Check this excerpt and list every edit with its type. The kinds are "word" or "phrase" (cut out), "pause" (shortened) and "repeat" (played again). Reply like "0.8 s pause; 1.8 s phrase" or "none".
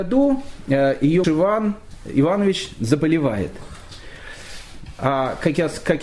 1.2 s word